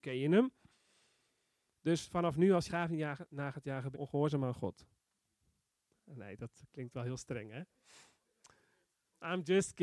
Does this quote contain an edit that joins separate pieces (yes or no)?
yes